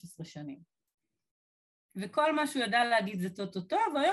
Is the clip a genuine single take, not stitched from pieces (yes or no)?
yes